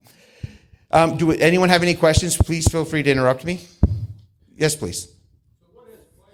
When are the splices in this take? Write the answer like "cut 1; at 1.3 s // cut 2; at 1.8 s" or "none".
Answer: none